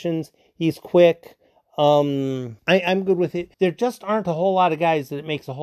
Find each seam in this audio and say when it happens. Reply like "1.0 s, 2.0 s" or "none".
2.6 s, 3.5 s